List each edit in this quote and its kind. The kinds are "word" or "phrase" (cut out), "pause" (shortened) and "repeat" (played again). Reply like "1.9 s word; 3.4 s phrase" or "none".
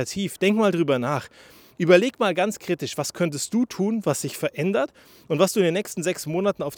none